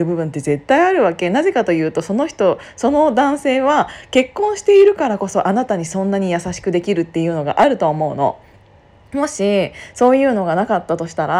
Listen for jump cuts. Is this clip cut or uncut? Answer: uncut